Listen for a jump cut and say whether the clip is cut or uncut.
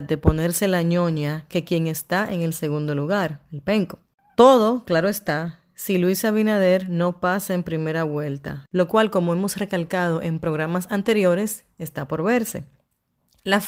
uncut